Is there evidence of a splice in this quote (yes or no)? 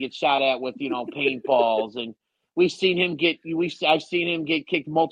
no